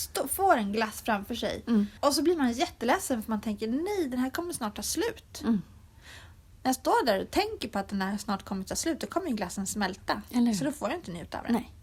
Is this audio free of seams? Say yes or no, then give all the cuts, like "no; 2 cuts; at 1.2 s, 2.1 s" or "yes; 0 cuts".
no; 1 cut; at 2.0 s